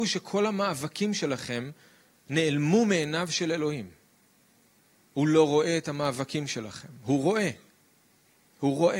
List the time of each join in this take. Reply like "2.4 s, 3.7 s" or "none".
none